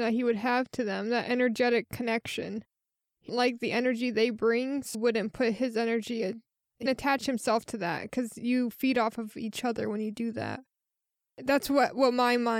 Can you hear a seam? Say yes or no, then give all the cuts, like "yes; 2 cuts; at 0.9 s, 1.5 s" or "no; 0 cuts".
yes; 4 cuts; at 3.3 s, 4.9 s, 6.9 s, 11.3 s